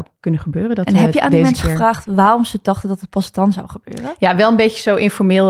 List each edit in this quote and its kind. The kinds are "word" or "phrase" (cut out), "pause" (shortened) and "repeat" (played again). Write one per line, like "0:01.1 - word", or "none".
none